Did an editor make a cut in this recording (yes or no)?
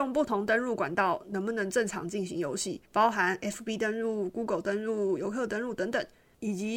yes